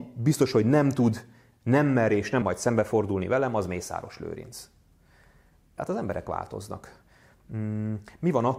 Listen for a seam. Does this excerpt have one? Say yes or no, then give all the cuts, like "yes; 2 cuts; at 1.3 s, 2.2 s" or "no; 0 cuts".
yes; 1 cut; at 2.4 s